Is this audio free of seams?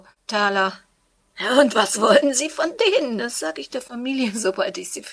yes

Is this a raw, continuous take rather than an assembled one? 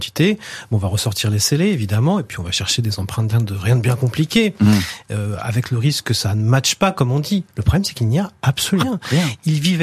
no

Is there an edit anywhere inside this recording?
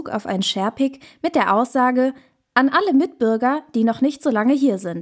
no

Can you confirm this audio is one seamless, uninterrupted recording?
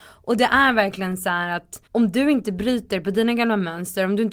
no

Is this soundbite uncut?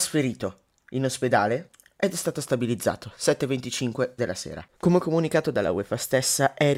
yes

